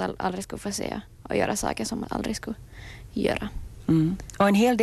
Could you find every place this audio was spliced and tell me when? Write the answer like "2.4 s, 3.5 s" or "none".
2.0 s